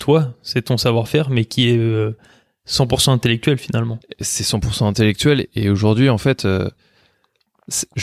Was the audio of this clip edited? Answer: no; 0 cuts

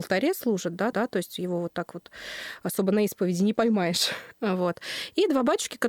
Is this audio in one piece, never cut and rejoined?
no; 1 cut; at 0.9 s

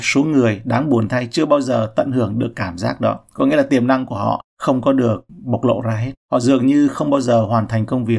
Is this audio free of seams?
yes; 0 cuts

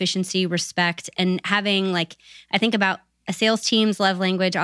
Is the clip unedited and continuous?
no; 1 cut; at 3.2 s

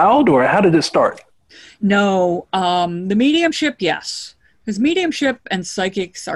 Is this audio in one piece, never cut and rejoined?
yes; 0 cuts

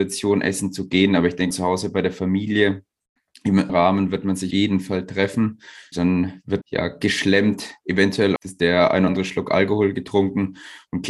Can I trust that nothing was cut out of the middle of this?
no; 7 cuts; at 1.5 s, 3.7 s, 4.5 s, 5.9 s, 6.6 s, 8.4 s, 9.1 s

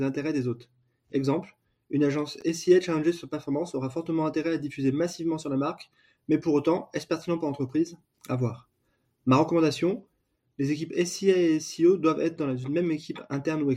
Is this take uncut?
yes; 0 cuts

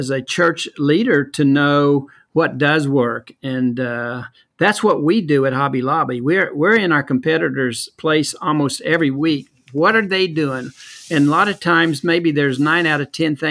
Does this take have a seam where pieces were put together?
no; 0 cuts

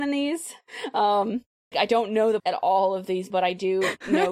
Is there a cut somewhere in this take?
yes; 3 cuts; at 1.7 s, 2.4 s, 3.3 s

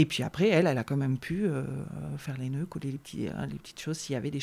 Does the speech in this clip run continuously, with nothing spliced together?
yes; 0 cuts

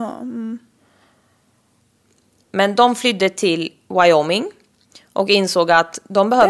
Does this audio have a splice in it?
no; 0 cuts

